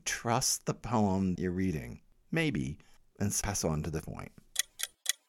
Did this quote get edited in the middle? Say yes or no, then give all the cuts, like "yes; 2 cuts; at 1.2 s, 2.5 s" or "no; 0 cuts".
yes; 3 cuts; at 1.3 s, 3.4 s, 4.0 s